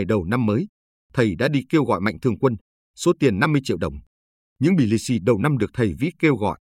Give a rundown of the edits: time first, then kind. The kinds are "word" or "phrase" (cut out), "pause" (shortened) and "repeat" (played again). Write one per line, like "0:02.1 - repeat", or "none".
none